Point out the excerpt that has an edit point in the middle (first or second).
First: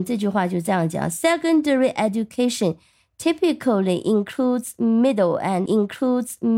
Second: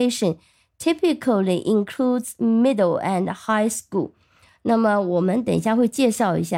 first